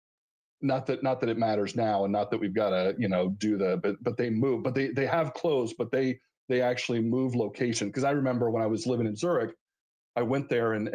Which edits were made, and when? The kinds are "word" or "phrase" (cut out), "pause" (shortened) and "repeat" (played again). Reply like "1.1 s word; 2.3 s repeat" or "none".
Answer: none